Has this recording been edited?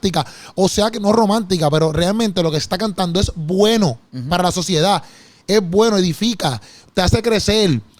no; 0 cuts

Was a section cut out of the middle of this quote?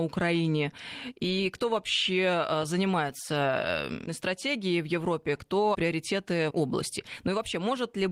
yes; 3 cuts; at 4.1 s, 5.7 s, 6.5 s

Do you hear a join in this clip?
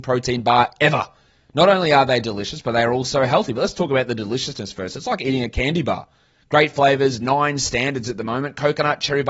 no; 0 cuts

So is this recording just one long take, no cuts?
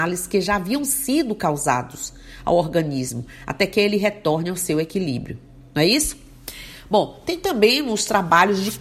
yes; 0 cuts

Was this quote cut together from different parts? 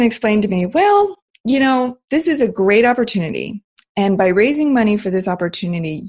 no; 0 cuts

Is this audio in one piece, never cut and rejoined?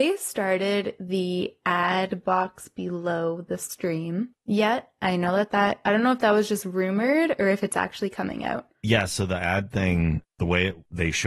yes; 0 cuts

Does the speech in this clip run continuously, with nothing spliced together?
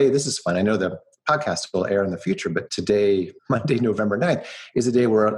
no; 1 cut; at 3.4 s

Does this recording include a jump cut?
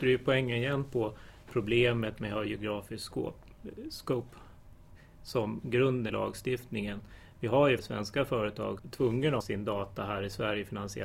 yes; 4 cuts; at 6.1 s, 7.8 s, 8.8 s, 9.4 s

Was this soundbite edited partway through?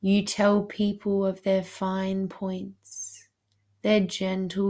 no; 0 cuts

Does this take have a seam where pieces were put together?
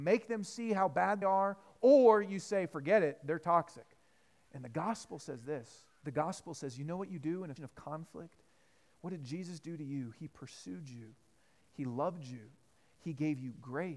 yes; 3 cuts; at 1.2 s, 6.0 s, 7.6 s

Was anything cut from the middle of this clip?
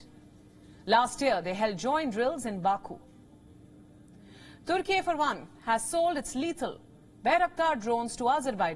no; 0 cuts

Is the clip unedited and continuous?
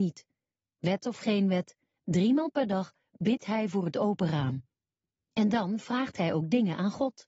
yes; 0 cuts

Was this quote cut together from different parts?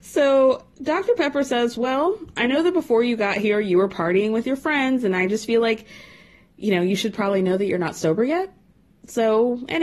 no; 0 cuts

